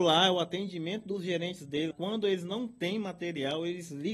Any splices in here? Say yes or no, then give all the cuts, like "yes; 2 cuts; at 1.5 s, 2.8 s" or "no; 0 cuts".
yes; 1 cut; at 1.9 s